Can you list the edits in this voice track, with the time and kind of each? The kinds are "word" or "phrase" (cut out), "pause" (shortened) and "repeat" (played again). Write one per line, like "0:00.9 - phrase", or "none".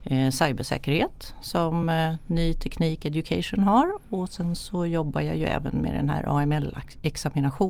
none